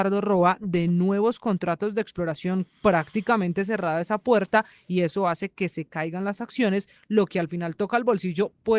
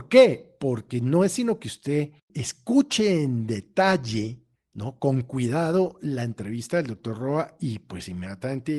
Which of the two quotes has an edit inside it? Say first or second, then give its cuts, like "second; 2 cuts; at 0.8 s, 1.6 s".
second; 2 cuts; at 2.2 s, 4.6 s